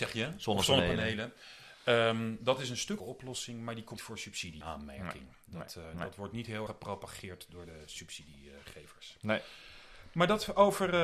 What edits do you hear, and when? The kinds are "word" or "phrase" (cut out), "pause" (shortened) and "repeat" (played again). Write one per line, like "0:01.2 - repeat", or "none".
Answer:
0:03.0 - word
0:04.0 - word
0:04.6 - word
0:05.8 - word
0:06.7 - word